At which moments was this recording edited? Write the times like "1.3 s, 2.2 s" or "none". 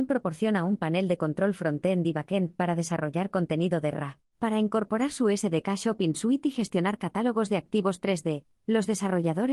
4.3 s